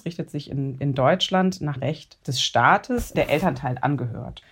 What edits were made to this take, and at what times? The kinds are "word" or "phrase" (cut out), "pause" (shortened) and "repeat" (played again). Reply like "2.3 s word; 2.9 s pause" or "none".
1.8 s word; 3.1 s word